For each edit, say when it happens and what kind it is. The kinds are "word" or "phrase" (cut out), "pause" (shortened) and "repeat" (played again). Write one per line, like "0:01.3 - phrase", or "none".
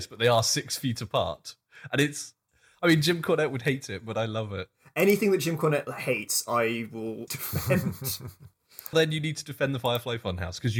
0:07.3 - word
0:08.9 - word